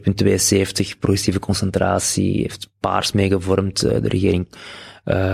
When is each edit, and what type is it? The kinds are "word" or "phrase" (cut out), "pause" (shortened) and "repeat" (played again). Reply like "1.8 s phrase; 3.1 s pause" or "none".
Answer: none

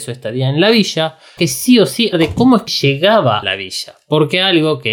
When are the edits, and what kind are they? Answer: 1.4 s word; 2.1 s word; 2.7 s word; 3.4 s word

